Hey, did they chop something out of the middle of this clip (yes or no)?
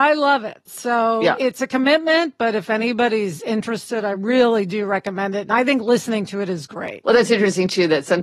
no